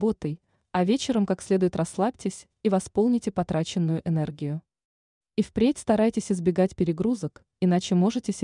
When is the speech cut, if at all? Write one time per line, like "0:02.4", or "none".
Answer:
none